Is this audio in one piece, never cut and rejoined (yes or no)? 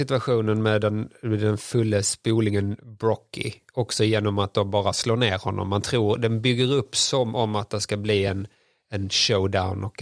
yes